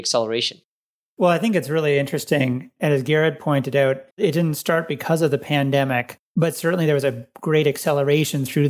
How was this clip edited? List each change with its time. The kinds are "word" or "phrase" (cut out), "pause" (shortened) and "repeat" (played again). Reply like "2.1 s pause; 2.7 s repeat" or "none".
4.1 s pause; 6.2 s pause